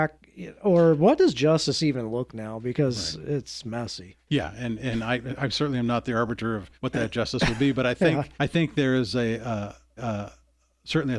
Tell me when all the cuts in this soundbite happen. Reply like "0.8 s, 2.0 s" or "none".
2.3 s, 6.7 s, 8.3 s, 10.0 s